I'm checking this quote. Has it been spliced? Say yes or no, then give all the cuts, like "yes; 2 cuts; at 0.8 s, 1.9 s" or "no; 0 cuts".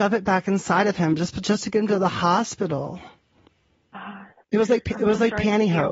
no; 0 cuts